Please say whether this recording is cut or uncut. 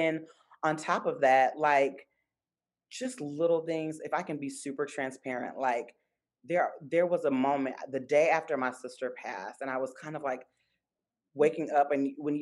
uncut